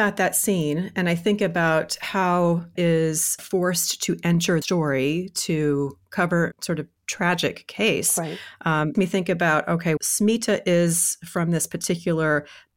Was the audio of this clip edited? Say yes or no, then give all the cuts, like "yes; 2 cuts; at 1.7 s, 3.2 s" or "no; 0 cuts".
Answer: yes; 7 cuts; at 2.8 s, 3.4 s, 4.6 s, 6.5 s, 7.0 s, 8.9 s, 10.0 s